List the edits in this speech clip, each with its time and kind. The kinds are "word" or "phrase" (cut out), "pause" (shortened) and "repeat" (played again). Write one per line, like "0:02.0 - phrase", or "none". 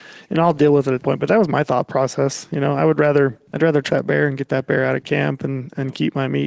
0:01.0 - word
0:03.5 - pause
0:03.9 - phrase